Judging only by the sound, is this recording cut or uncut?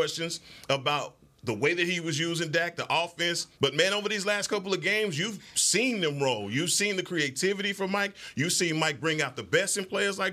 cut